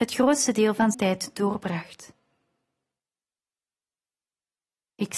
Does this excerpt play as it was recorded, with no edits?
no; 1 cut; at 0.9 s

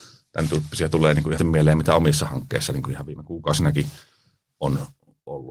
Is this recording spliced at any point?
yes; 1 cut; at 1.4 s

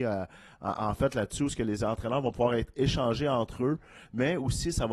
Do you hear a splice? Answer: no; 0 cuts

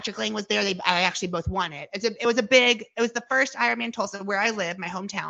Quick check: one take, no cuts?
yes; 0 cuts

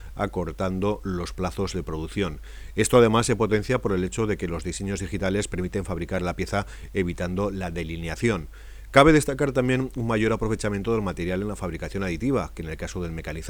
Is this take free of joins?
yes; 0 cuts

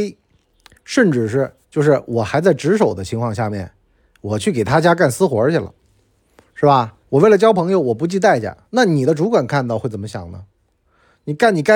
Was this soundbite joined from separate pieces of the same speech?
yes; 3 cuts; at 1.6 s, 7.0 s, 8.6 s

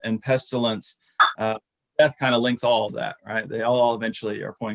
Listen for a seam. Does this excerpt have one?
no; 0 cuts

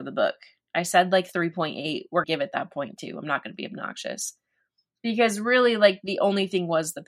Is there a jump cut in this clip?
yes; 1 cut; at 2.2 s

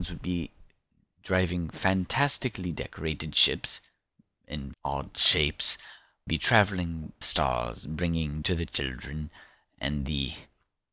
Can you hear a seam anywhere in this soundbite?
yes; 4 cuts; at 4.7 s, 6.3 s, 7.2 s, 8.4 s

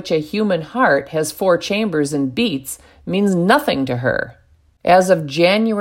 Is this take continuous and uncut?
yes; 0 cuts

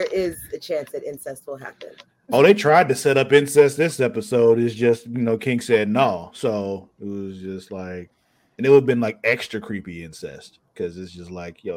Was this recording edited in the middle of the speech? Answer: no; 0 cuts

